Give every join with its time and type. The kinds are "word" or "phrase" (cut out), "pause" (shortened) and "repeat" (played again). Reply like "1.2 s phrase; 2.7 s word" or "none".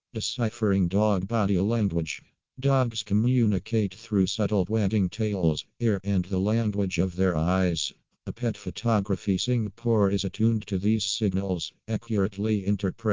4.7 s word; 6.0 s word; 8.3 s word